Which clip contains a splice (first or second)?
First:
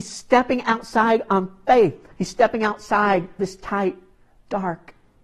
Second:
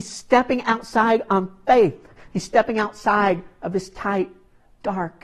first